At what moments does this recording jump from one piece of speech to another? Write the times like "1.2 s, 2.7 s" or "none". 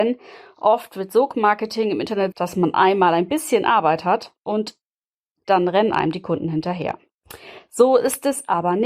2.3 s, 4.4 s